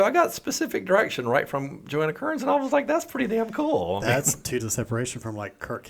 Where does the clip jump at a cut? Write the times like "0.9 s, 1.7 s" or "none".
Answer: 4.6 s